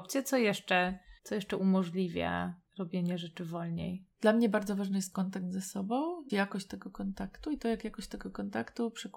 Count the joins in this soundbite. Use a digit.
4